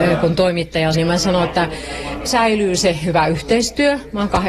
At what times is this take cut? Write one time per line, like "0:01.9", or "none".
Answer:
0:00.9
0:02.3